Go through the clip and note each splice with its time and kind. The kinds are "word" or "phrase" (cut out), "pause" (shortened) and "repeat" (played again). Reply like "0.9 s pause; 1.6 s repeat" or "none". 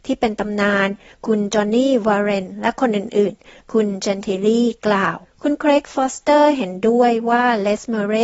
5.2 s pause